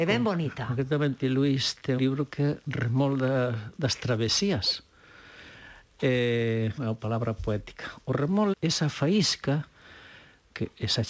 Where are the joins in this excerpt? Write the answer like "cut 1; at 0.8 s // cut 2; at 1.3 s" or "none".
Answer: cut 1; at 2.0 s // cut 2; at 6.8 s // cut 3; at 8.5 s